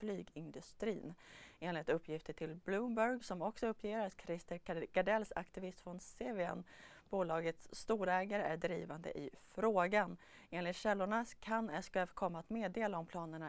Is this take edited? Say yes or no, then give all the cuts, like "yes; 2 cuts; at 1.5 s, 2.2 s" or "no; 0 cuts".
no; 0 cuts